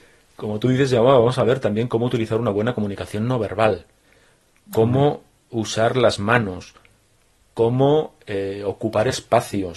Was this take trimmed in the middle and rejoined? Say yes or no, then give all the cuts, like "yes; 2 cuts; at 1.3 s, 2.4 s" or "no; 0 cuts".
no; 0 cuts